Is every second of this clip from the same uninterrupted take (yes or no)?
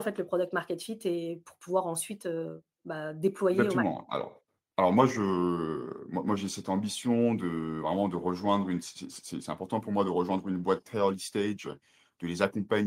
yes